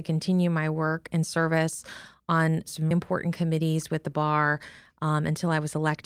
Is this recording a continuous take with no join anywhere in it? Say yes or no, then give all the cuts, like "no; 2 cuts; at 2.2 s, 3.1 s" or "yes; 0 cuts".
no; 1 cut; at 2.9 s